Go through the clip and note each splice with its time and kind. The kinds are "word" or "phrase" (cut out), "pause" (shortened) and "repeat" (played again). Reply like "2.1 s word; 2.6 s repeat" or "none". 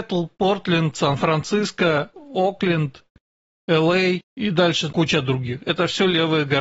4.3 s pause; 4.9 s word